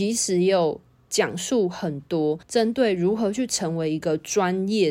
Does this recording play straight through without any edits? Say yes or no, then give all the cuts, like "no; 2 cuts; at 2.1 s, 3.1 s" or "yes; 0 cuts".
no; 1 cut; at 2.4 s